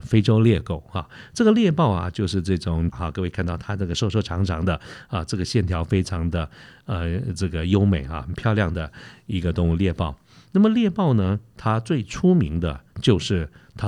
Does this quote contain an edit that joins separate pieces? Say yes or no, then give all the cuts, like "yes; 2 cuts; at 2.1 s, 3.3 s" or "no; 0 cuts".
yes; 1 cut; at 2.9 s